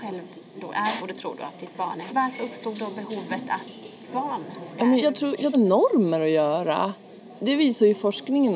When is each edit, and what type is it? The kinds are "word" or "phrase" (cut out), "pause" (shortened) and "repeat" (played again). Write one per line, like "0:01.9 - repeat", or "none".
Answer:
0:01.0 - word
0:02.1 - word
0:04.1 - phrase
0:05.0 - word
0:05.5 - phrase

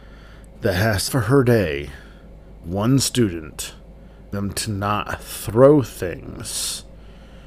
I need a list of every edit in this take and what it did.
0:01.1 - phrase
0:02.6 - word
0:04.3 - word

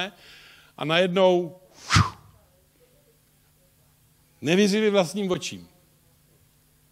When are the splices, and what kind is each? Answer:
none

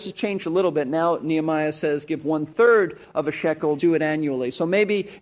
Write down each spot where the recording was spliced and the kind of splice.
0:03.8 - word

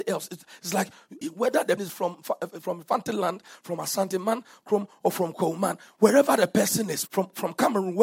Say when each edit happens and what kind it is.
0:01.2 - word
0:01.8 - word
0:07.1 - word

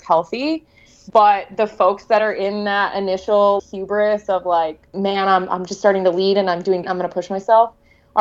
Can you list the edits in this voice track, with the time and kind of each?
0:03.6 - word
0:04.9 - pause
0:06.8 - word

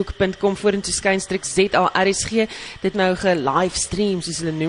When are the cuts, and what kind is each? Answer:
0:02.9 - word

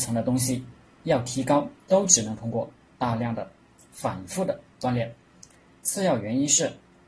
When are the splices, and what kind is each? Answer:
0:01.8 - pause
0:04.7 - pause

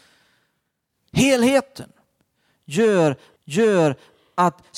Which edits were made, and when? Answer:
0:03.4 - repeat

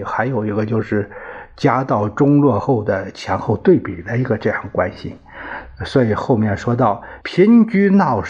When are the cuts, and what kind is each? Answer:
0:07.2 - pause

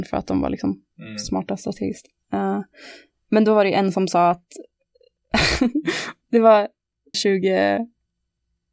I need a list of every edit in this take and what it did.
0:07.1 - phrase

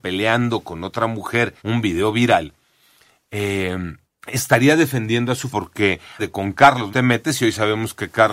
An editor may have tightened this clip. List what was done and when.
0:01.6 - pause
0:04.0 - pause
0:05.5 - word
0:06.2 - word
0:06.9 - word

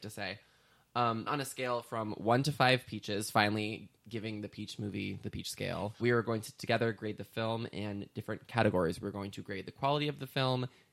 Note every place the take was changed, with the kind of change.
0:01.3 - word
0:06.0 - word

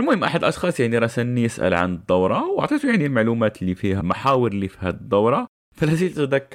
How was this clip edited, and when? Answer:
0:04.0 - word

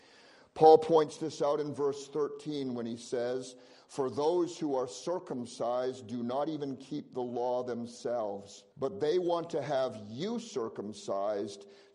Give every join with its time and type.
0:08.7 - pause

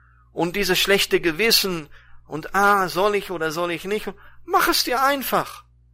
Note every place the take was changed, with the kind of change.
none

